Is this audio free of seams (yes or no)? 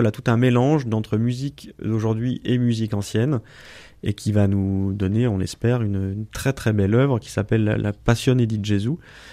yes